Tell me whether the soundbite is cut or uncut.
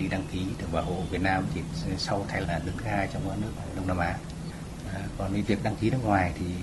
cut